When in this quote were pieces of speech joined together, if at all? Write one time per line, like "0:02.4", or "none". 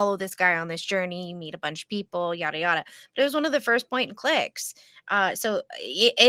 none